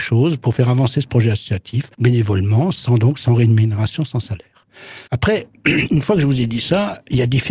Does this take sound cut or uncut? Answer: cut